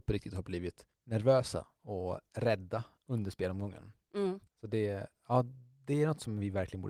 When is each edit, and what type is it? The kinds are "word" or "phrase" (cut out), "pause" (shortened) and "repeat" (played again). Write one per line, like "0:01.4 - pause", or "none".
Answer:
0:00.9 - pause
0:04.5 - pause